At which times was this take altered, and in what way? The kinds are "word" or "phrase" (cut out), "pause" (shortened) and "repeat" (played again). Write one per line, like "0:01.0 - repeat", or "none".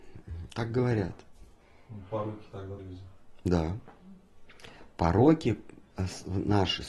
0:02.8 - word